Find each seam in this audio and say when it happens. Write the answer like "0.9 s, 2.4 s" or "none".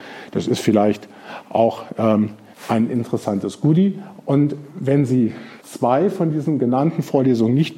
2.5 s, 5.6 s